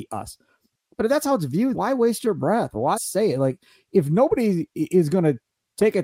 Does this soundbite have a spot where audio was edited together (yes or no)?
yes